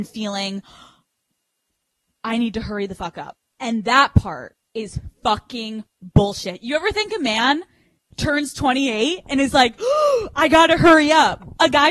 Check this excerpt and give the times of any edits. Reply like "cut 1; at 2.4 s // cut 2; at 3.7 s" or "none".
cut 1; at 4.7 s